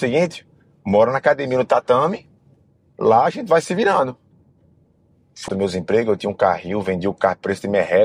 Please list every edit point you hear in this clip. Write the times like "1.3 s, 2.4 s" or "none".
5.5 s